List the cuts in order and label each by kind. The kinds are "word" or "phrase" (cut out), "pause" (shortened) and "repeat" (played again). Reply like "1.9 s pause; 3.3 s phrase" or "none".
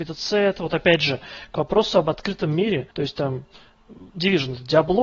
2.9 s pause; 4.1 s pause